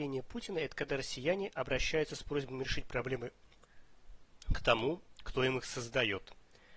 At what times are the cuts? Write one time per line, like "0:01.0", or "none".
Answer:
none